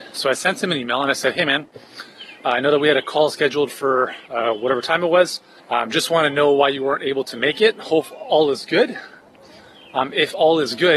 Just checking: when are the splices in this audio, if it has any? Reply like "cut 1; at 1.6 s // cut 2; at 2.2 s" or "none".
cut 1; at 4.2 s // cut 2; at 5.6 s